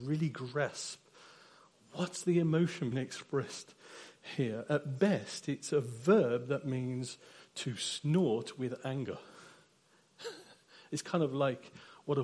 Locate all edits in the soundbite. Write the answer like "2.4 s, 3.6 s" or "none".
2.9 s